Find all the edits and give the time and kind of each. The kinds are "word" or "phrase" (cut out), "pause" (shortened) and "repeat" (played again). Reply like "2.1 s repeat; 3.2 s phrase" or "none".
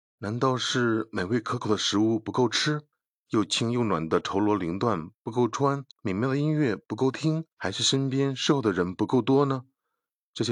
2.9 s pause; 5.9 s pause; 7.5 s pause